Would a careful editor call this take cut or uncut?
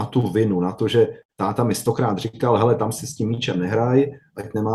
uncut